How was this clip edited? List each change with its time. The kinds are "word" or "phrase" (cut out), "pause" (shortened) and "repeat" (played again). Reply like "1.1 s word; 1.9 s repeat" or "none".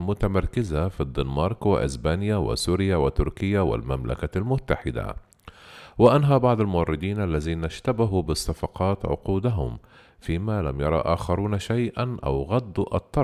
none